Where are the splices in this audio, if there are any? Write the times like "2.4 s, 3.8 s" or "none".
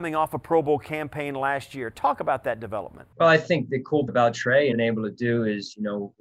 3.1 s, 4.1 s, 4.7 s